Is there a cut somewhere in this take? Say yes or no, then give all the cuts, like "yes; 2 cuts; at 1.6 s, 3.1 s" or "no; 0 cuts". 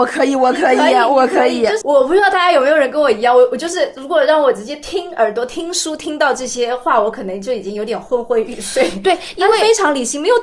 yes; 1 cut; at 1.8 s